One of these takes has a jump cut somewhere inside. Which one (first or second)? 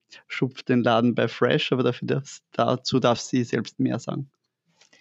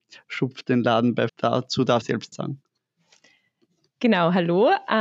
second